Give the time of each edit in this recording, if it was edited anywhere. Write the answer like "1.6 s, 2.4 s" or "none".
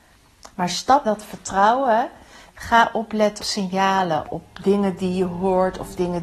1.1 s, 2.5 s, 3.4 s, 4.2 s